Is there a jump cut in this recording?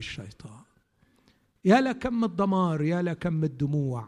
no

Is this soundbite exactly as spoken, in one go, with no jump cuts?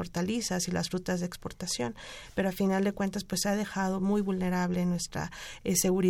yes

